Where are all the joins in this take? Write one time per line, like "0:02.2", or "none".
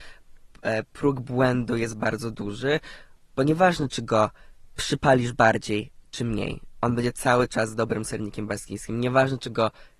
none